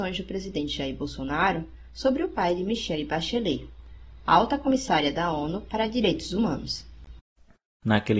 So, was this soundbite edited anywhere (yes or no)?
no